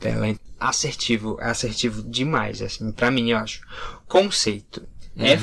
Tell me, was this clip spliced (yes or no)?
no